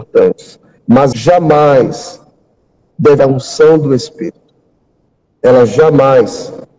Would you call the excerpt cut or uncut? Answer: cut